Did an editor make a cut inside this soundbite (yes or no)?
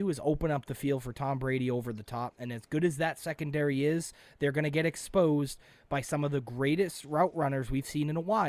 no